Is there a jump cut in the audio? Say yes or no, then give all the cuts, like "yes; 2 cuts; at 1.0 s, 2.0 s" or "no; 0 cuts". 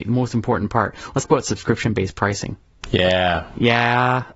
yes; 1 cut; at 1.2 s